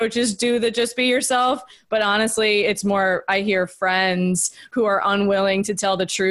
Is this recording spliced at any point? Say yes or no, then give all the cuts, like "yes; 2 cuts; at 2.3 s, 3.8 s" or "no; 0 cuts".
no; 0 cuts